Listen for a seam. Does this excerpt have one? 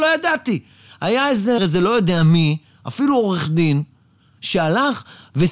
yes; 1 cut; at 1.6 s

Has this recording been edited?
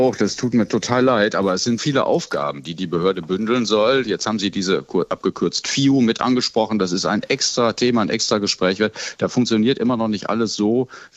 yes; 1 cut; at 1.8 s

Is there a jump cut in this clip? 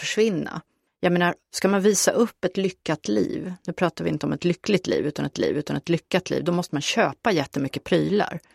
yes; 1 cut; at 5.3 s

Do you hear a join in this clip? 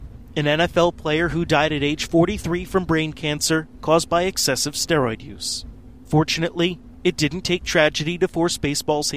no; 0 cuts

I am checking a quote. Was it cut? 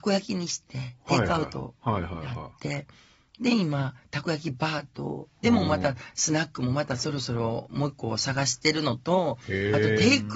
no; 0 cuts

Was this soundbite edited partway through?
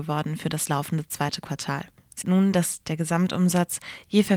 yes; 1 cut; at 2.2 s

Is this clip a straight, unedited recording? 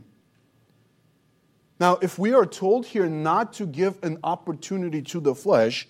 yes; 0 cuts

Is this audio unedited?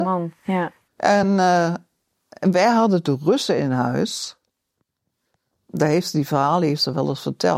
yes; 0 cuts

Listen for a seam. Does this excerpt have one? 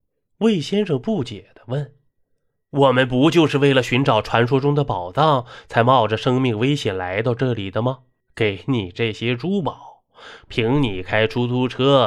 yes; 1 cut; at 8.2 s

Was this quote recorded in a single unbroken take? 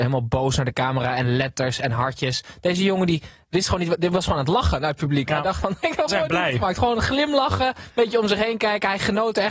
no; 1 cut; at 6.1 s

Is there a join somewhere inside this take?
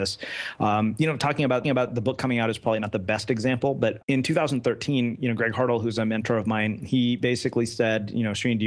yes; 2 cuts; at 1.6 s, 4.0 s

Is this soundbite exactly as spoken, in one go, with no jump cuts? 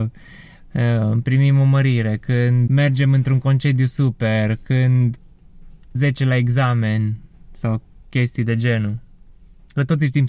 no; 2 cuts; at 2.7 s, 6.0 s

